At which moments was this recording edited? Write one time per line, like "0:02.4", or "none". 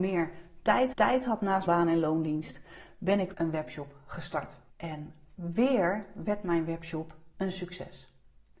0:00.9
0:01.7
0:03.3
0:04.7